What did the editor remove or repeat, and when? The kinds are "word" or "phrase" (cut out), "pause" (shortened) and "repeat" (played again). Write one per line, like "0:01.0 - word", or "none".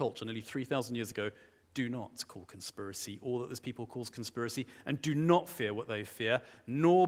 none